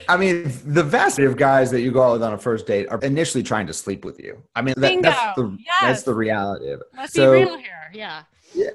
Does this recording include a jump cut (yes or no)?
yes